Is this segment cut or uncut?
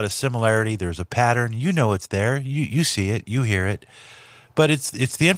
uncut